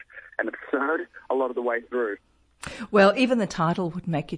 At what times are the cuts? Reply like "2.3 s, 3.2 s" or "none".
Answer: none

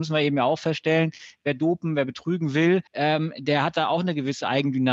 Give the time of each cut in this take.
2.9 s

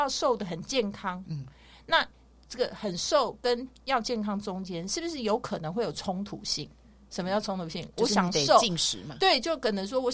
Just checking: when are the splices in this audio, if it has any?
none

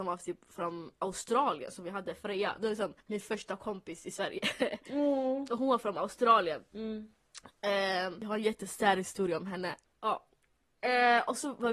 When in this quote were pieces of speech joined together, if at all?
3.0 s

